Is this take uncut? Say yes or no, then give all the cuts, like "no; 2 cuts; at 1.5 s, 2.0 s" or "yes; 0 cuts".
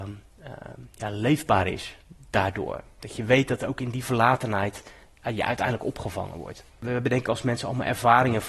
no; 1 cut; at 6.7 s